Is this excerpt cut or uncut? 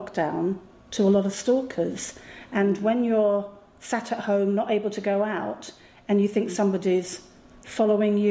uncut